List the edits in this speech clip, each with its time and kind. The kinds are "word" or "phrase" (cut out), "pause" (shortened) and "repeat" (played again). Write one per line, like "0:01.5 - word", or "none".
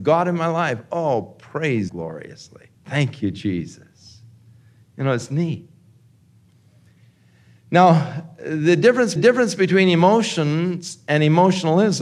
0:01.9 - phrase
0:02.7 - pause
0:09.2 - repeat